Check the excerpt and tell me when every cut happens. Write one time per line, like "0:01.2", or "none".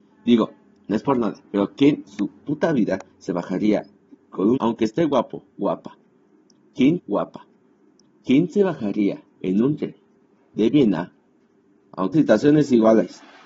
0:01.4
0:02.1
0:03.1
0:04.1
0:04.6
0:07.0
0:09.3
0:12.1